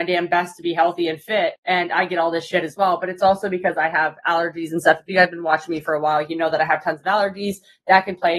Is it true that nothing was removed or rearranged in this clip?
yes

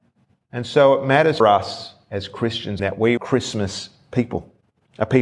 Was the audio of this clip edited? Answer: yes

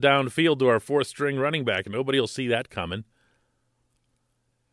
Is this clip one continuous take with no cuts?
yes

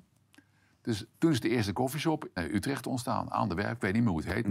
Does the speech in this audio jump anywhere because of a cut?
yes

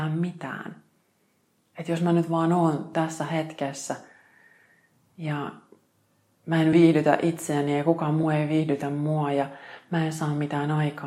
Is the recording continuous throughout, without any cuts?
yes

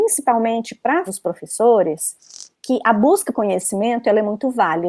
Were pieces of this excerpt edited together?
yes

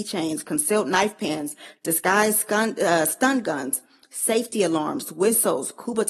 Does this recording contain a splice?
no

